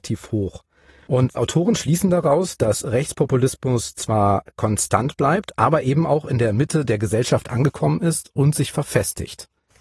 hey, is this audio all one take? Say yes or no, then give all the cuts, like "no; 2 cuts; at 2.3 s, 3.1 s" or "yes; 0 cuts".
no; 1 cut; at 1.4 s